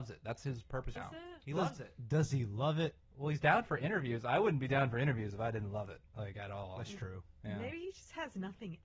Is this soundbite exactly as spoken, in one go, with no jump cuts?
no; 3 cuts; at 1.0 s, 3.0 s, 6.1 s

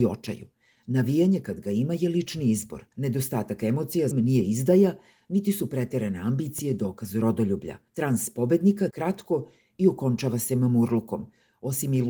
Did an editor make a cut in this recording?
yes; 4 cuts; at 2.9 s, 4.1 s, 7.9 s, 8.9 s

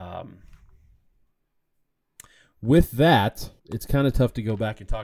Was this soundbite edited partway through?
yes; 1 cut; at 3.6 s

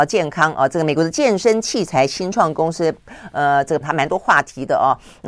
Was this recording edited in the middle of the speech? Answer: yes; 1 cut; at 3.8 s

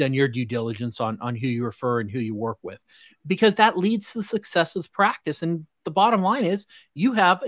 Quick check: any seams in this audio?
no; 0 cuts

